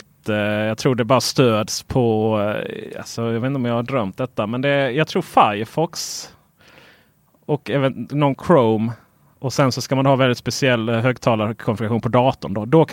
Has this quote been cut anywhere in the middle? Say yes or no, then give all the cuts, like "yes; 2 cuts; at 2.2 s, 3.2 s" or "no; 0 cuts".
no; 0 cuts